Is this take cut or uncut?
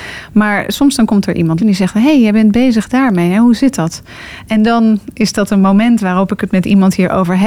cut